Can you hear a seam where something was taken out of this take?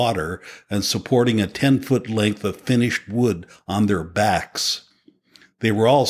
no; 0 cuts

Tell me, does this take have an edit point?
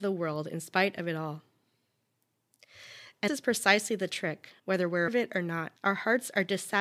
yes; 4 cuts; at 3.3 s, 4.6 s, 5.1 s, 5.8 s

